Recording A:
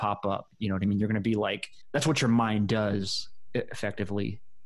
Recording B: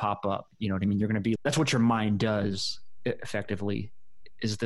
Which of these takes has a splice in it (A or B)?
B